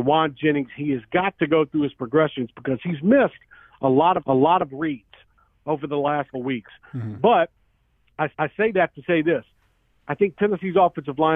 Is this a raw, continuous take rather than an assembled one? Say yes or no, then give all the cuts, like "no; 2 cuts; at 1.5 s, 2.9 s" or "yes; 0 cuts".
no; 3 cuts; at 4.2 s, 6.3 s, 8.3 s